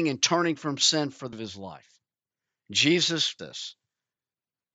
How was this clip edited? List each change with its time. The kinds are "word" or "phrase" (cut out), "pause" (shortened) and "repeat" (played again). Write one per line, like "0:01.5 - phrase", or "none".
0:01.3 - word
0:03.4 - word